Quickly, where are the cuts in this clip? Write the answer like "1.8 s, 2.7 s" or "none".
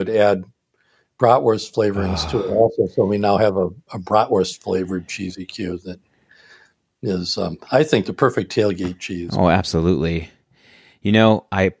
none